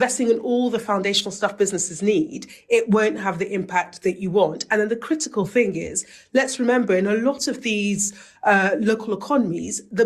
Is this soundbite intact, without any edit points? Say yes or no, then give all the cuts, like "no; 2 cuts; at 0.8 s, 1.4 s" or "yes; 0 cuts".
yes; 0 cuts